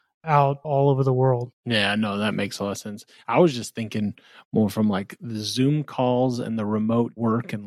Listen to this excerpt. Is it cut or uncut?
cut